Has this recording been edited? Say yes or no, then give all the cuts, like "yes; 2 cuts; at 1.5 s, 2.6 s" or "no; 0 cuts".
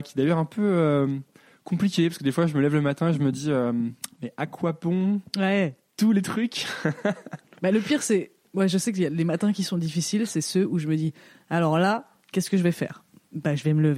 no; 0 cuts